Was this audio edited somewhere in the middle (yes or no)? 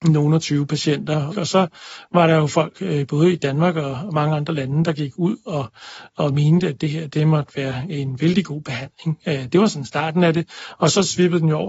no